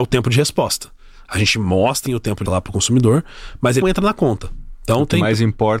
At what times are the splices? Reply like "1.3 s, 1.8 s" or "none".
2.1 s, 2.5 s, 3.8 s